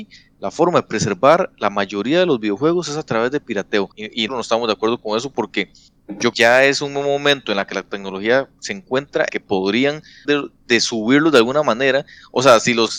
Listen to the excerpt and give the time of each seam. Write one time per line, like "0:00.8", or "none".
0:03.9
0:04.3
0:06.3
0:09.3
0:10.2